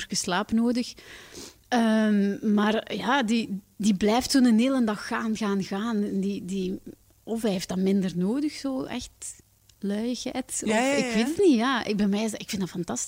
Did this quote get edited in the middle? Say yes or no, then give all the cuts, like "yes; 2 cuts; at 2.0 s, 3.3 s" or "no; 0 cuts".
no; 0 cuts